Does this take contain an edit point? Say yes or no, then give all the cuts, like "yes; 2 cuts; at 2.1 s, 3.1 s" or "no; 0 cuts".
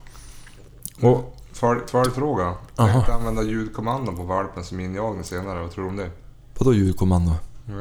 no; 0 cuts